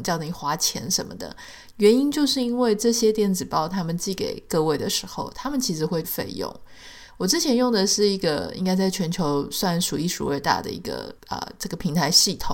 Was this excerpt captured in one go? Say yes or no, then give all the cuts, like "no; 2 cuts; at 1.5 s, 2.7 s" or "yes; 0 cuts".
no; 2 cuts; at 6.0 s, 11.2 s